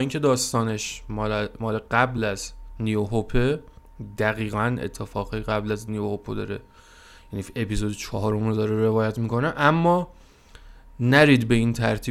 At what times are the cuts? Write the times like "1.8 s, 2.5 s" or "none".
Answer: none